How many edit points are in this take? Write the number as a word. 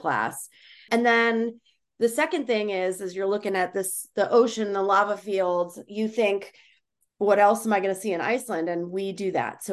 zero